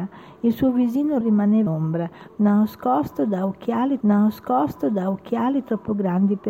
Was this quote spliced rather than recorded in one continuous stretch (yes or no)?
yes